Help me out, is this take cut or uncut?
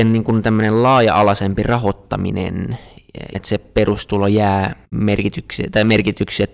cut